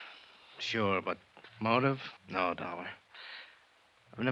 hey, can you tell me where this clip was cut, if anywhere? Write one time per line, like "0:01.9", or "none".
0:02.2